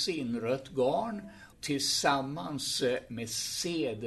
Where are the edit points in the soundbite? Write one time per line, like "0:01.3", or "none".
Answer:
0:01.5